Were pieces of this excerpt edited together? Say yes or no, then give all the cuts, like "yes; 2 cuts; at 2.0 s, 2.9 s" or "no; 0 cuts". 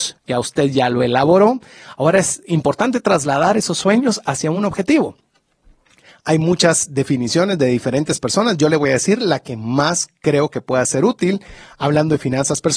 no; 0 cuts